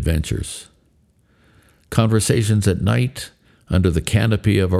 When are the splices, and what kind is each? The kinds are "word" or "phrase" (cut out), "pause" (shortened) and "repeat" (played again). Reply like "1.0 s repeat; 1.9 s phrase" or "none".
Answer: none